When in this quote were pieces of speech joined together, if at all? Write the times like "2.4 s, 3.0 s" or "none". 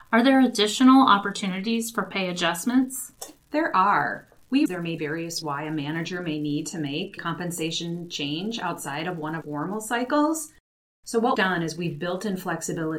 4.7 s, 5.0 s, 5.4 s, 7.2 s, 9.4 s, 11.3 s